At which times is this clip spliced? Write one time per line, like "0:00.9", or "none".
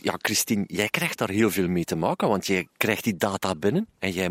none